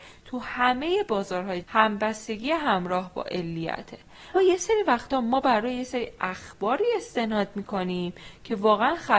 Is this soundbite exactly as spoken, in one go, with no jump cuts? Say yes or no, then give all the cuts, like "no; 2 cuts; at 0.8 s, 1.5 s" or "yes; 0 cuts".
no; 2 cuts; at 1.6 s, 4.4 s